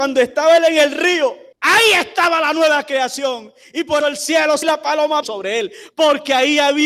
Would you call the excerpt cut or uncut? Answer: cut